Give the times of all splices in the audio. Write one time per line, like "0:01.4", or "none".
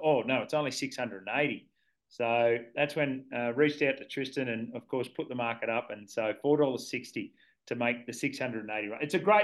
none